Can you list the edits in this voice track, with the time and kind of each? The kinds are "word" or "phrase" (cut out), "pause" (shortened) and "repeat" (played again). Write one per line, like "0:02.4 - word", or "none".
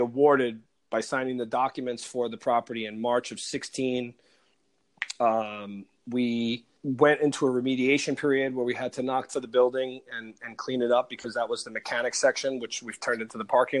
0:06.8 - pause
0:09.3 - phrase